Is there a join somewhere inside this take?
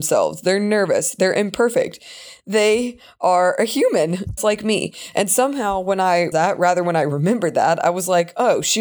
yes; 2 cuts; at 4.4 s, 6.3 s

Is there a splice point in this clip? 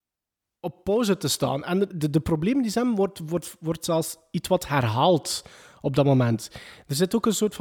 yes; 1 cut; at 1.9 s

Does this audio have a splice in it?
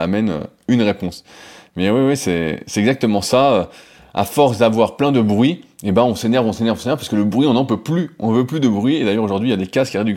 no; 0 cuts

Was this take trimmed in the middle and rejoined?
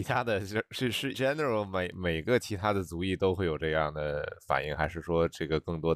yes; 1 cut; at 1.1 s

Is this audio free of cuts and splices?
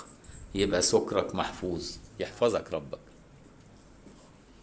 no; 1 cut; at 2.1 s

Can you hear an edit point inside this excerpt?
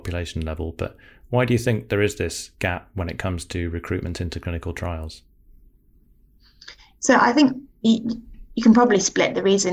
no; 0 cuts

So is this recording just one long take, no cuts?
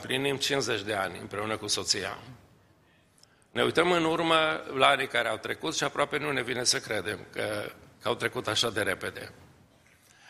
yes; 0 cuts

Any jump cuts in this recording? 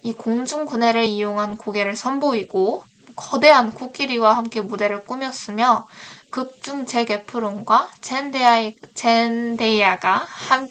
no; 0 cuts

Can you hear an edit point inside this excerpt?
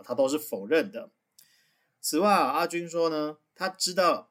no; 0 cuts

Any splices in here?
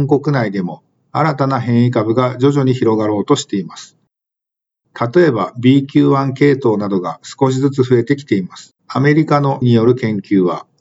yes; 2 cuts; at 8.8 s, 9.6 s

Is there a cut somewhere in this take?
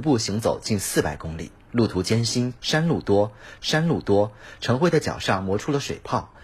yes; 1 cut; at 3.6 s

